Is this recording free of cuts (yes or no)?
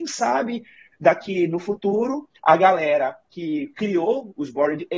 no